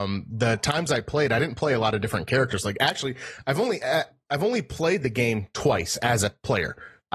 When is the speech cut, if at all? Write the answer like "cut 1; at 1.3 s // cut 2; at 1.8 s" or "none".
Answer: none